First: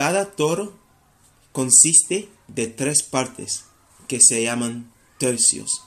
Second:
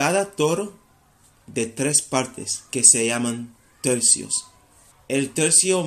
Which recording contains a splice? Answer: second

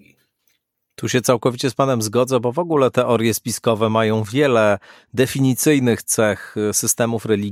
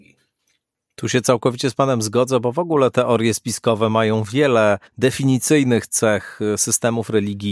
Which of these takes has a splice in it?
second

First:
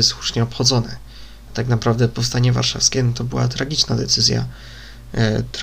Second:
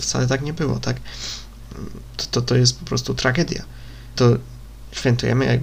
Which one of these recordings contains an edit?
second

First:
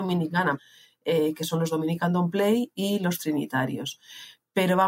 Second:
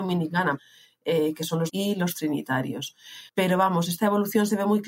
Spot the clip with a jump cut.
second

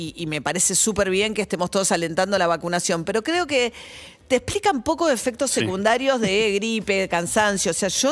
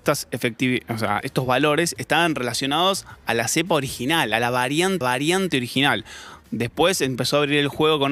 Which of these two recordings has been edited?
second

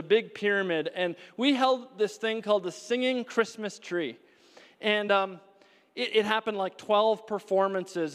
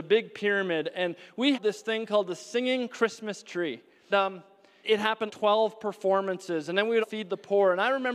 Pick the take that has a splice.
second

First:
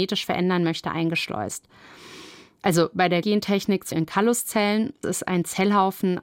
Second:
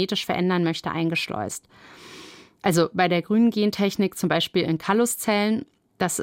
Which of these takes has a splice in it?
first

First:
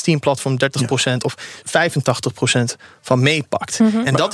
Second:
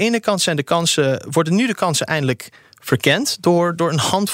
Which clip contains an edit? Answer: first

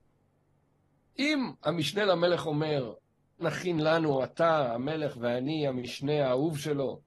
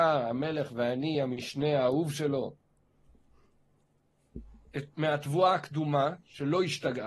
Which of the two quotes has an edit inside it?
first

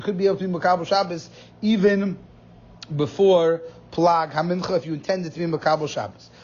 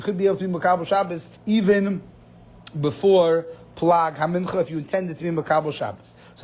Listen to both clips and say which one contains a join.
second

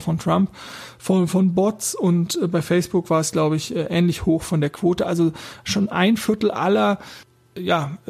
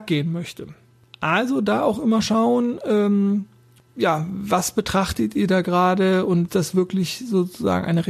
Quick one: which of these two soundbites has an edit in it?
second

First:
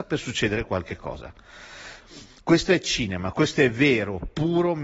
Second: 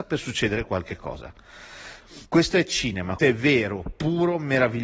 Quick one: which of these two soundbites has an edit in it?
second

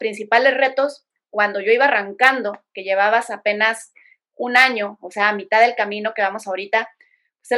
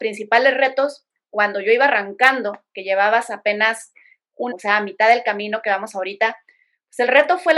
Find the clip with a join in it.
second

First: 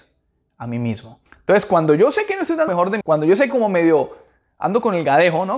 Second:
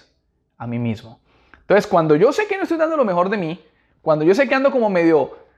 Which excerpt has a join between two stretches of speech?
first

